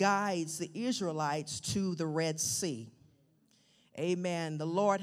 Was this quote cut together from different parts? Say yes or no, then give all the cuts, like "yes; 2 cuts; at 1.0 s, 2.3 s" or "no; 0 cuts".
no; 0 cuts